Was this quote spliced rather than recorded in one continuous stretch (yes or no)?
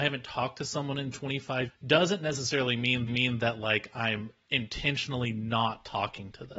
yes